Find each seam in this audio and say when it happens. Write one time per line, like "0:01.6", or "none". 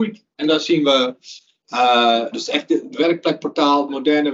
0:02.3